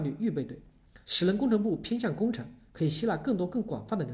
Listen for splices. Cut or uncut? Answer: cut